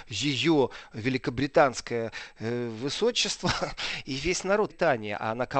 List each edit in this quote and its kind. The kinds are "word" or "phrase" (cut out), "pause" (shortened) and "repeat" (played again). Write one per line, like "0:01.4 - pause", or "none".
0:04.7 - word